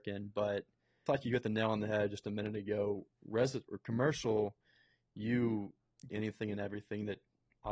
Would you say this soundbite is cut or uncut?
cut